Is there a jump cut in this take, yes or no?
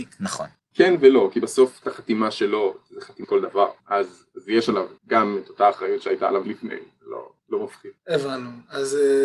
yes